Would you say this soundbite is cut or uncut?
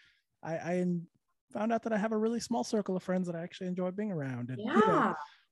uncut